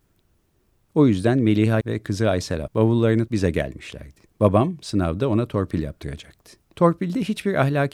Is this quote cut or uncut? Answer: cut